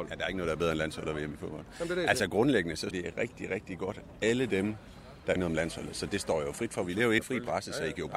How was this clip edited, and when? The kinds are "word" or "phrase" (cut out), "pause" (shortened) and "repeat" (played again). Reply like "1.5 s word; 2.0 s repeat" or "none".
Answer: 2.9 s phrase; 5.4 s phrase; 7.2 s phrase